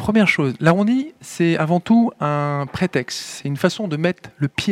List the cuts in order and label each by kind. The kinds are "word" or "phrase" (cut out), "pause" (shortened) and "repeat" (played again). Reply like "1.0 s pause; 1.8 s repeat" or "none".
none